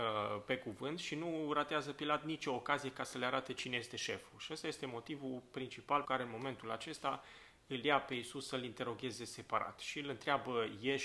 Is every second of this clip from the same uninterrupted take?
no; 1 cut; at 6.0 s

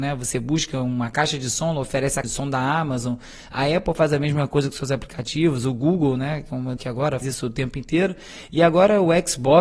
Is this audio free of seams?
no; 3 cuts; at 2.2 s, 6.8 s, 7.2 s

